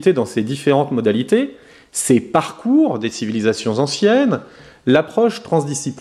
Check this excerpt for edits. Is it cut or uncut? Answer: uncut